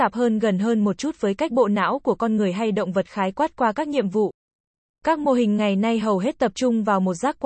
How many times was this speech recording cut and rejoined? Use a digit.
0